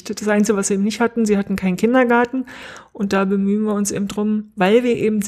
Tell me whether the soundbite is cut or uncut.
uncut